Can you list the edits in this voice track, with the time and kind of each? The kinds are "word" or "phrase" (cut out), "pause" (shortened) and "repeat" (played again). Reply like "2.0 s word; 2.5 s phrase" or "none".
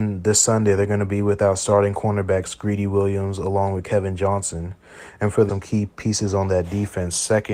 5.5 s phrase